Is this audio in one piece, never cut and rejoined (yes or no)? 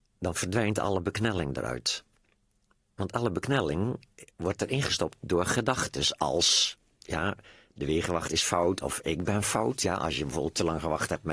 yes